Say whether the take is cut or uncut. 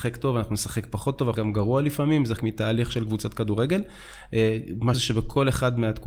cut